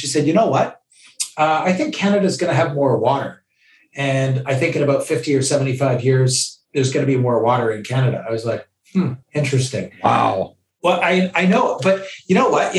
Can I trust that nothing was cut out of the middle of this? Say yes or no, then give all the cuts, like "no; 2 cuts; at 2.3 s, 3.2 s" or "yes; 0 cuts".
no; 1 cut; at 9.2 s